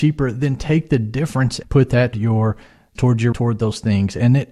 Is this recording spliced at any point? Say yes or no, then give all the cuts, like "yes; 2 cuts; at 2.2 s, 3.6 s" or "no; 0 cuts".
yes; 4 cuts; at 1.6 s, 2.1 s, 3.0 s, 3.3 s